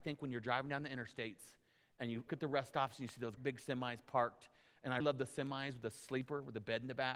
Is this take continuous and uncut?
no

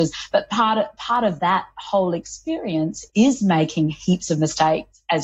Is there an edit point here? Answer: yes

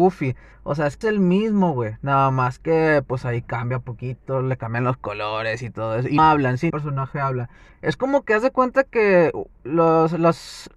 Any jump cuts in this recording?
yes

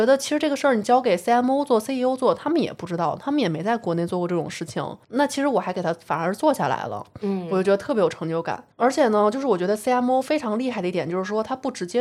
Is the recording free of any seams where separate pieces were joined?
no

